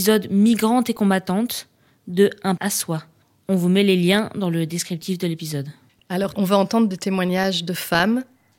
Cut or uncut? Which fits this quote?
cut